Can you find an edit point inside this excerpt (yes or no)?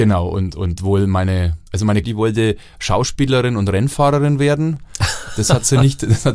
yes